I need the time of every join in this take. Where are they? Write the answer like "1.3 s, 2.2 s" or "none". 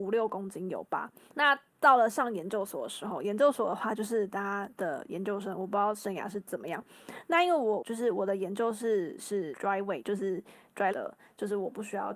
9.5 s, 10.0 s, 10.9 s